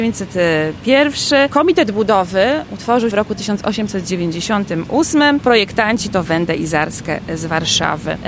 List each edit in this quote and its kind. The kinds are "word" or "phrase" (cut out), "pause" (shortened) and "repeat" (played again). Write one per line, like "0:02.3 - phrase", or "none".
0:03.1 - word
0:06.2 - phrase